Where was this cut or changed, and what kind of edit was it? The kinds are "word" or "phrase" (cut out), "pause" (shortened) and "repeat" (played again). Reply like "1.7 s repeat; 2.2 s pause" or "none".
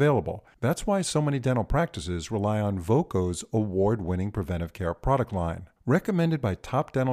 none